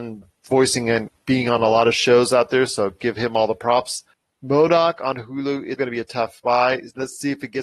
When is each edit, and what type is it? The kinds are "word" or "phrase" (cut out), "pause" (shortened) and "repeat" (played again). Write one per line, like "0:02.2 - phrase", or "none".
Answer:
0:04.1 - pause
0:05.8 - word